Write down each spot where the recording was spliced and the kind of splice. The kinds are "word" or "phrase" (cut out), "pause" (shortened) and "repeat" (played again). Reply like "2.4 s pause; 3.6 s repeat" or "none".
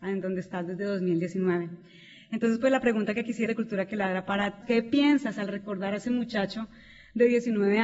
3.5 s phrase; 4.6 s phrase